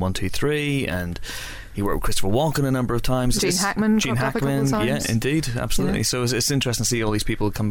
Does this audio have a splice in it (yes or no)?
yes